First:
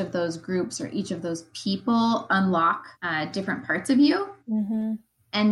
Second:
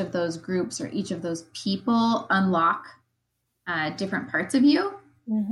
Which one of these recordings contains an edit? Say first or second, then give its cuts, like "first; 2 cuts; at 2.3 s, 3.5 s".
first; 2 cuts; at 2.9 s, 4.4 s